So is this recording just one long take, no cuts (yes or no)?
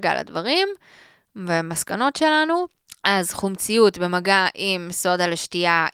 yes